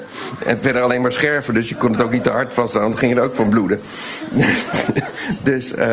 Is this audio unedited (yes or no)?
yes